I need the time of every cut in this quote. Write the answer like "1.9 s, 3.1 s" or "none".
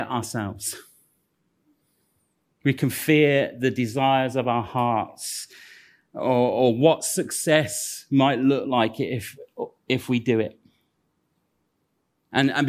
none